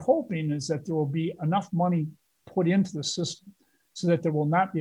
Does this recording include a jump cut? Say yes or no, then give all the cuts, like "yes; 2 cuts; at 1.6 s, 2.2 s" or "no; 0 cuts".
no; 0 cuts